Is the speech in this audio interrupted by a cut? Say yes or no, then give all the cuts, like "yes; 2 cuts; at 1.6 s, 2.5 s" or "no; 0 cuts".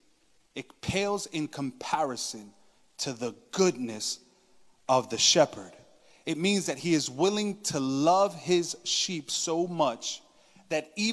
no; 0 cuts